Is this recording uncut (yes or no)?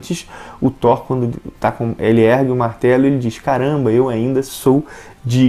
yes